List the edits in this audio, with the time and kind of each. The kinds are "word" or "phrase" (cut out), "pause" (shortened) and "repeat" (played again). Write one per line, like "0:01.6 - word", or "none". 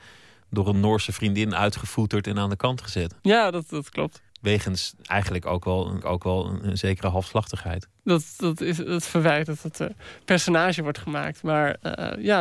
0:03.2 - pause
0:04.3 - pause
0:06.0 - repeat